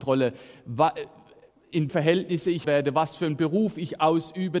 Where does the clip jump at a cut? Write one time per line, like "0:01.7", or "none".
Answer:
0:01.9
0:02.6